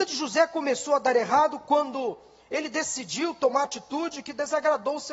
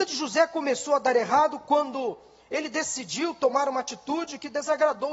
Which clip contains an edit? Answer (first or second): first